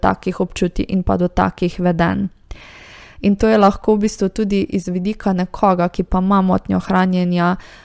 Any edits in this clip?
no; 0 cuts

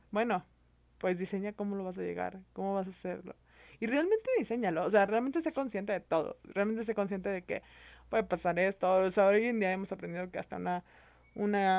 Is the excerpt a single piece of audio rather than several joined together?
yes; 0 cuts

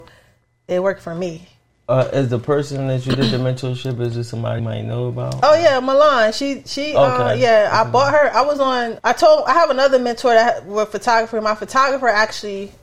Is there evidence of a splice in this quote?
yes; 3 cuts; at 1.7 s, 4.6 s, 9.0 s

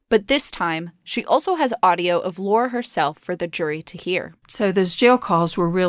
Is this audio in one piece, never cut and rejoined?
no; 1 cut; at 4.4 s

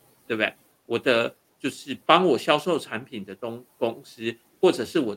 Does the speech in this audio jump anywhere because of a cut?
no; 0 cuts

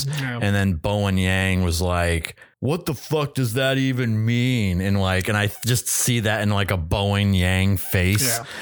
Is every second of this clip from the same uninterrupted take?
no; 1 cut; at 2.5 s

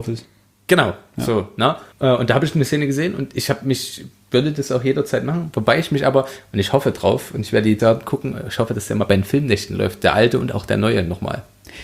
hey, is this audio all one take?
no; 2 cuts; at 1.9 s, 7.8 s

